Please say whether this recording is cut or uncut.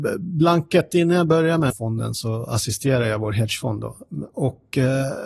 cut